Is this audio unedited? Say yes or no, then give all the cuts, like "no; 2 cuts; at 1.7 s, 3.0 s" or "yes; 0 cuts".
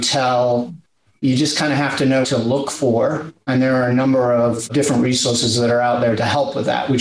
no; 1 cut; at 2.2 s